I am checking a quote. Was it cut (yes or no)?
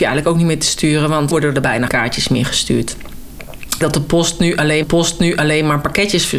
yes